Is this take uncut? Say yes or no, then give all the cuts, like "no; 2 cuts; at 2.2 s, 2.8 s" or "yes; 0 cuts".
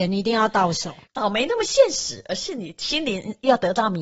no; 1 cut; at 1.0 s